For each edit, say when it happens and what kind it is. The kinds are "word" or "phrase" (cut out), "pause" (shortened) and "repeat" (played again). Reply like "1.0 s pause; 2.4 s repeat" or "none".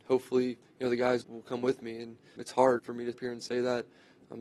1.2 s word; 2.4 s word; 2.8 s word; 3.1 s word